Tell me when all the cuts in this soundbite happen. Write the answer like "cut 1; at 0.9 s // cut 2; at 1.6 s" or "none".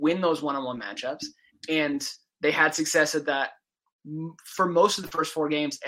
none